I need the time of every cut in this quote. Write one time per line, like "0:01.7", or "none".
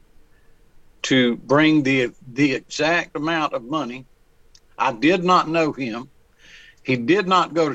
none